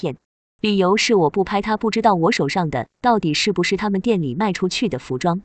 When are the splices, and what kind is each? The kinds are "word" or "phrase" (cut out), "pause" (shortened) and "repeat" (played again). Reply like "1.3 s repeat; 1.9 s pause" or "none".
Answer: none